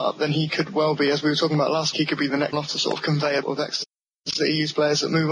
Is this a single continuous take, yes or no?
no